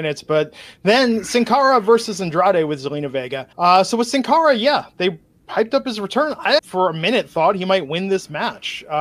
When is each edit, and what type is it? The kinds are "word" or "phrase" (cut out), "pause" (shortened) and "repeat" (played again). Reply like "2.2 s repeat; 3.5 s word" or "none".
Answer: 3.5 s pause; 6.6 s word